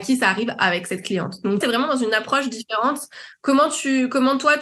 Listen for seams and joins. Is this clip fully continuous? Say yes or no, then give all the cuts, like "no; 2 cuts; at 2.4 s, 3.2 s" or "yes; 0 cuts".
no; 1 cut; at 1.6 s